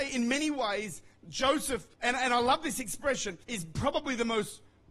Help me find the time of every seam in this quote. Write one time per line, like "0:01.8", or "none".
0:01.9
0:03.4